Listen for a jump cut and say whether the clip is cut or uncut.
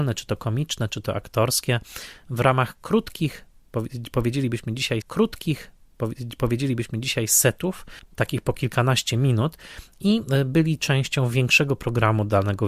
cut